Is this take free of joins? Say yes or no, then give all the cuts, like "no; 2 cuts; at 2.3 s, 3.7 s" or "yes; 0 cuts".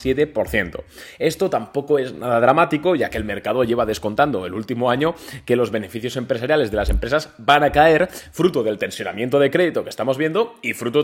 yes; 0 cuts